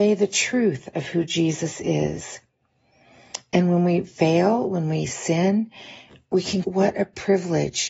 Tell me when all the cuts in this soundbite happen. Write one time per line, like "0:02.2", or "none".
0:06.6